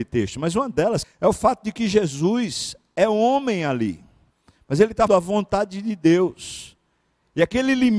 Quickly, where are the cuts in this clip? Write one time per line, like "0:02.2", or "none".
0:01.0
0:04.3
0:05.1